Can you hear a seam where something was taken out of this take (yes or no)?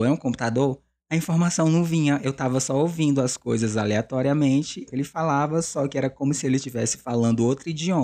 yes